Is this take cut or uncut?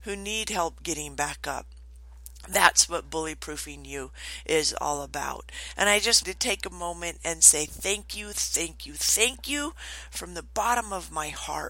cut